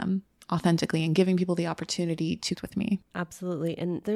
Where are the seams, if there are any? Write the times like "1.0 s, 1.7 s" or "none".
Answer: 2.6 s, 3.0 s